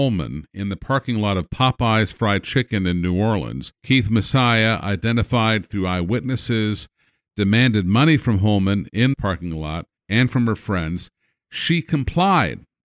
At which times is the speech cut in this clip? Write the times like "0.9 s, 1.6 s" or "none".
3.7 s, 9.1 s, 10.0 s